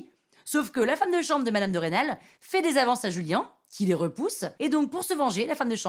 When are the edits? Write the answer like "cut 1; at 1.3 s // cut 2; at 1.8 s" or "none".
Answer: cut 1; at 4.6 s